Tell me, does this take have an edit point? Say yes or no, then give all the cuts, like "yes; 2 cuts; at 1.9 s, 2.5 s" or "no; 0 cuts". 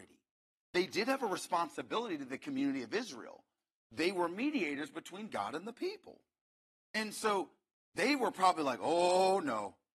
no; 0 cuts